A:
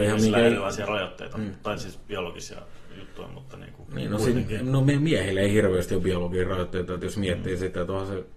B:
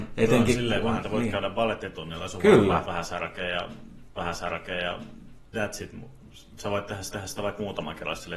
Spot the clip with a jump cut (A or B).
B